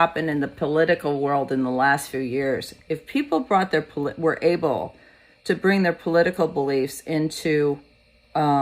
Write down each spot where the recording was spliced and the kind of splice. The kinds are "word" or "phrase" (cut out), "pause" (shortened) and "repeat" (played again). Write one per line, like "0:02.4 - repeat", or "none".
none